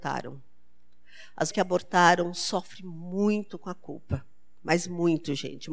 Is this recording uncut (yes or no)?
no